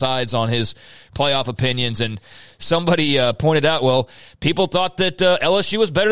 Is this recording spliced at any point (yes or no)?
no